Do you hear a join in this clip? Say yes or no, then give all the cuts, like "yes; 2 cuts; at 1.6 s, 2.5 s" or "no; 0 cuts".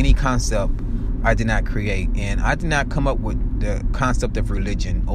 no; 0 cuts